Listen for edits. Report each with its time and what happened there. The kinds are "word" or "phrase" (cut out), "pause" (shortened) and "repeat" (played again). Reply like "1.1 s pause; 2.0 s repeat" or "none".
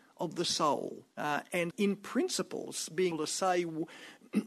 1.1 s pause; 1.7 s word; 3.1 s word